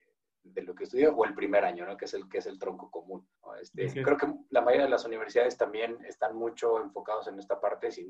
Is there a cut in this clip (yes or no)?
yes